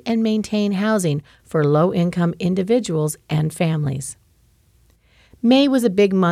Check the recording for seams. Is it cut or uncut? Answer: uncut